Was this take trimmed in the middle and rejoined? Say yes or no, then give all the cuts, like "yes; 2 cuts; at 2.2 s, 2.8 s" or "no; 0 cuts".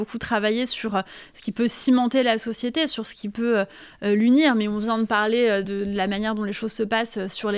no; 0 cuts